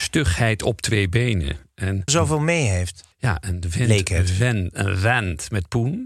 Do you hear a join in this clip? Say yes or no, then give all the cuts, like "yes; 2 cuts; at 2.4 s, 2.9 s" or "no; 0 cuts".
yes; 2 cuts; at 2.1 s, 3.1 s